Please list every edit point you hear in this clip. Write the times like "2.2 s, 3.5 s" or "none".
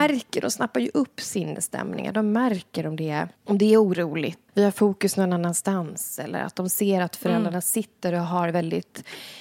3.4 s, 4.5 s